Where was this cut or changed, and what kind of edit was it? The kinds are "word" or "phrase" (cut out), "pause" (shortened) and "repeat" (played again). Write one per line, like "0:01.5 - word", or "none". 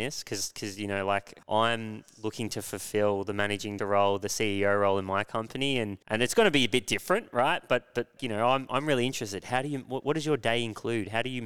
0:01.4 - pause
0:03.8 - word
0:06.0 - pause
0:08.2 - word